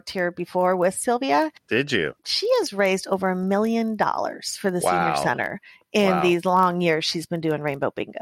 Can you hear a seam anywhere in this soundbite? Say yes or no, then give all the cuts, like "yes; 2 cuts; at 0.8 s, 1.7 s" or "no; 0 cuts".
no; 0 cuts